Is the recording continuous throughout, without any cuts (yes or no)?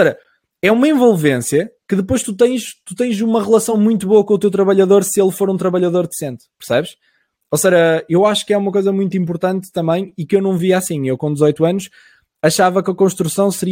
yes